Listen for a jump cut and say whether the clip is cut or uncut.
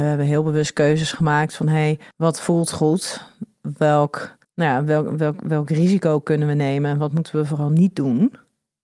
cut